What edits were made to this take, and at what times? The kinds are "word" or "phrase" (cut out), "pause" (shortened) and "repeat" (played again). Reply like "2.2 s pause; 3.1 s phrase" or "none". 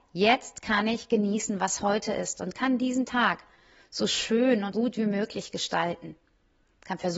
4.7 s word